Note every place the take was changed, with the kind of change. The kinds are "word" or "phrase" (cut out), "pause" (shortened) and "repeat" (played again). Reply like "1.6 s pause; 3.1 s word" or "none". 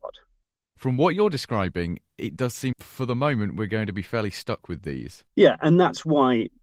2.7 s word; 5.3 s pause